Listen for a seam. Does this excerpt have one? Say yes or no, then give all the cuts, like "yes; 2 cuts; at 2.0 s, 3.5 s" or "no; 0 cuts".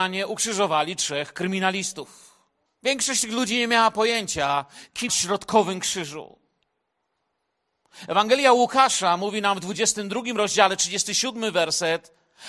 yes; 2 cuts; at 2.7 s, 5.1 s